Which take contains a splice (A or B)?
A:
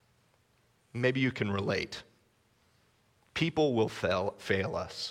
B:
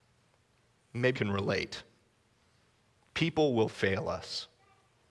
B